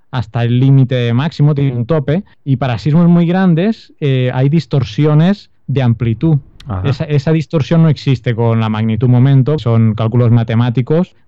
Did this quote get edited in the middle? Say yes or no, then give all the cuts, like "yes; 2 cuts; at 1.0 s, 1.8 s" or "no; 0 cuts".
yes; 1 cut; at 9.6 s